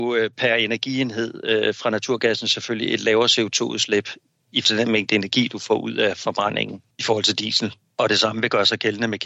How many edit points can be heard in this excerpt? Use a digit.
1